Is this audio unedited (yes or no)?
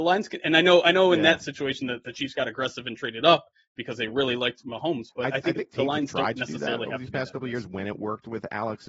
yes